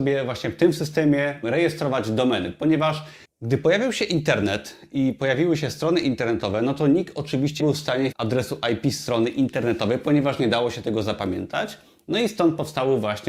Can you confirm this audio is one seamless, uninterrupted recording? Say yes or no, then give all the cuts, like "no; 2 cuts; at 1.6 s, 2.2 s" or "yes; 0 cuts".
no; 4 cuts; at 1.4 s, 3.2 s, 7.6 s, 8.1 s